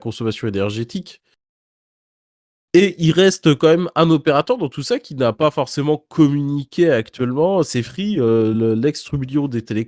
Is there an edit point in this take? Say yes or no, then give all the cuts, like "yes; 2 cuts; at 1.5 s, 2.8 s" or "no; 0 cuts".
no; 0 cuts